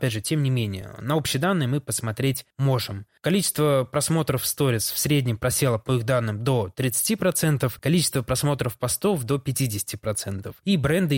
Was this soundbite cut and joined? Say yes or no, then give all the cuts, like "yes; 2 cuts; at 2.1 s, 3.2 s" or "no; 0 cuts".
no; 0 cuts